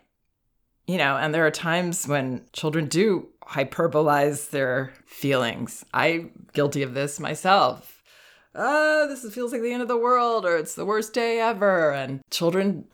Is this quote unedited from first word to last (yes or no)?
yes